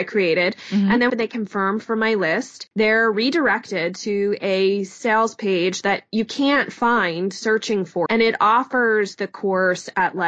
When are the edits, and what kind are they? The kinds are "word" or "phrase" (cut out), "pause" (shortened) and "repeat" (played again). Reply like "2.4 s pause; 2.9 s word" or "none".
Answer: 1.1 s phrase; 8.1 s word

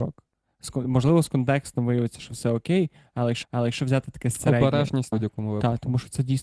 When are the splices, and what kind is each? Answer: 3.4 s repeat; 5.1 s phrase

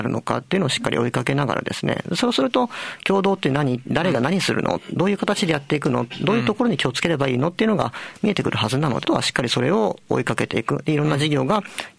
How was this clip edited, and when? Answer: 9.0 s phrase

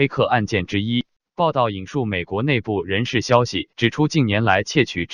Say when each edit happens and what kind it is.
1.2 s pause; 3.7 s pause

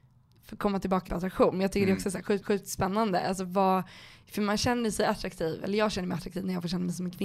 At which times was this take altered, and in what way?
1.1 s phrase; 2.4 s repeat

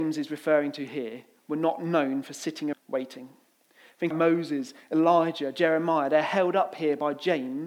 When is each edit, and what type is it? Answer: 2.7 s word; 4.1 s word

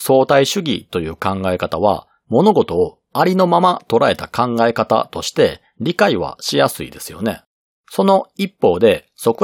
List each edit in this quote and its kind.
7.8 s pause

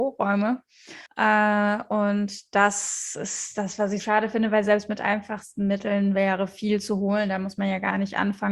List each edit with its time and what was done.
1.1 s pause; 4.0 s word

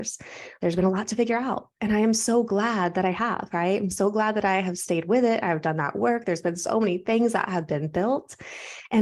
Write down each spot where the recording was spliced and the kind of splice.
none

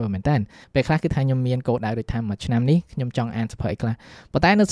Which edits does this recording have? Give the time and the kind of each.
none

